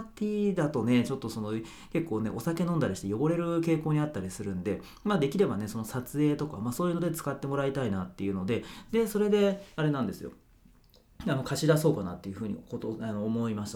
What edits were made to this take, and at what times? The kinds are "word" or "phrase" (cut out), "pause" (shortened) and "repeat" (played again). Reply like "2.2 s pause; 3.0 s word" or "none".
none